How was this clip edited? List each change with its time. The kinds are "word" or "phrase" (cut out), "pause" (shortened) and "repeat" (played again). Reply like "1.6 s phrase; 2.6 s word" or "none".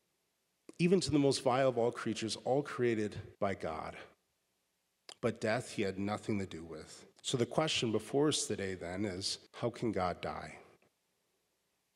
3.3 s pause; 7.2 s pause; 9.5 s pause